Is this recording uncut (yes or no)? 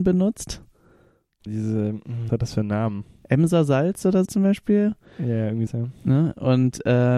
no